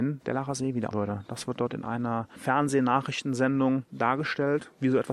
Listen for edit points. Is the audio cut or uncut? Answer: cut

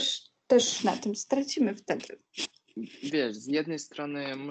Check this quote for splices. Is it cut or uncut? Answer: uncut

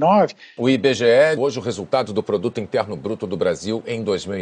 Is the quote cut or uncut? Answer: cut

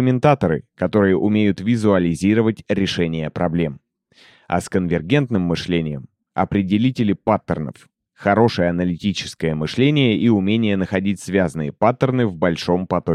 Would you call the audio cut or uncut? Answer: uncut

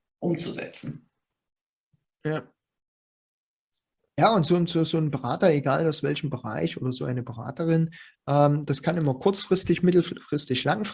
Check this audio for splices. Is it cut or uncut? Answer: uncut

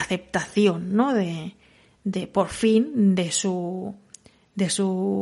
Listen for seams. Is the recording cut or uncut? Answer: uncut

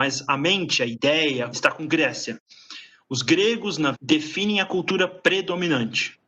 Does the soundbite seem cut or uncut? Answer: cut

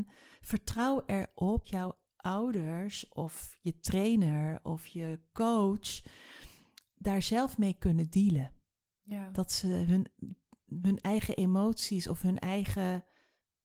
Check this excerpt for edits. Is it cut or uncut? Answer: cut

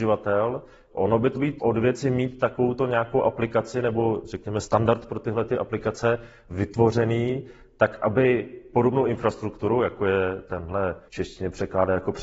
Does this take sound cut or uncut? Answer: cut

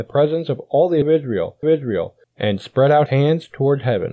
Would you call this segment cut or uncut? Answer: cut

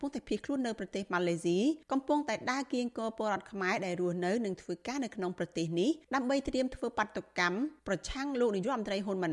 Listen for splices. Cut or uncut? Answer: cut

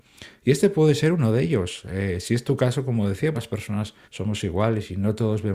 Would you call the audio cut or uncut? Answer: cut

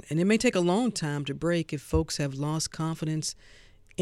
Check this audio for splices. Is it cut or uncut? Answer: uncut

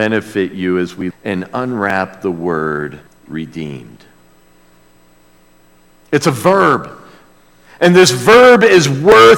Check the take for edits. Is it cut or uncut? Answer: cut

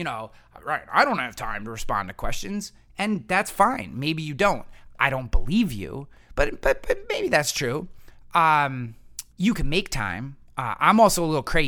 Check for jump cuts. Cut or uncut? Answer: cut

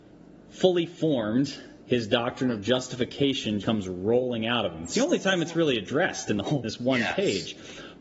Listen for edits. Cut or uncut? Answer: cut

